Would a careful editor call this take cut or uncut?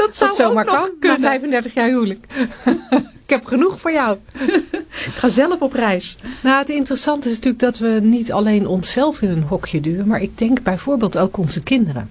uncut